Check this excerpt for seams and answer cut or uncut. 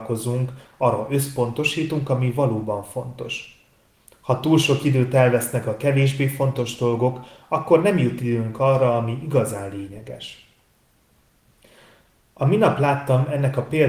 uncut